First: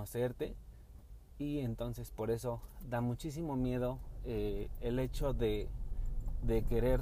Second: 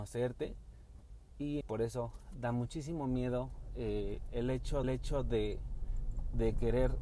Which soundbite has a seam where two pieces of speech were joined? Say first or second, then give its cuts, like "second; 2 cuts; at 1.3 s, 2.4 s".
second; 2 cuts; at 1.6 s, 4.8 s